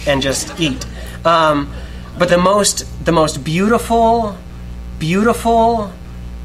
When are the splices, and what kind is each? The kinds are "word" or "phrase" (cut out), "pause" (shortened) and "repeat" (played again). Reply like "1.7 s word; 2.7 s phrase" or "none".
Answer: 2.3 s word; 5.0 s repeat